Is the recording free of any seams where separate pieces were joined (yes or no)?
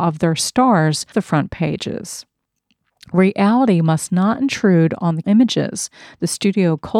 no